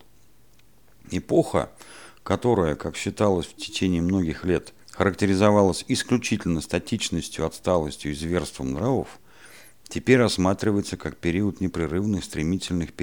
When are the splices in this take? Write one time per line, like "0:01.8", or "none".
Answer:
0:04.8